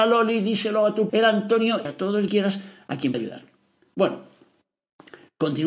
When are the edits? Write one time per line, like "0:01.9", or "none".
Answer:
0:01.1
0:01.9
0:02.3
0:03.1